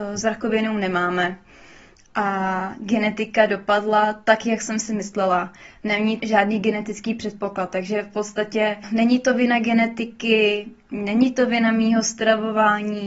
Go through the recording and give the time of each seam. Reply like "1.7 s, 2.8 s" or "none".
6.2 s, 8.8 s